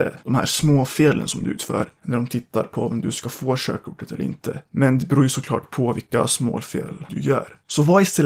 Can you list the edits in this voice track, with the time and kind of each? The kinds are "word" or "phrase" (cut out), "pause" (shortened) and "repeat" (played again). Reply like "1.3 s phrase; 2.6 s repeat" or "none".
7.1 s word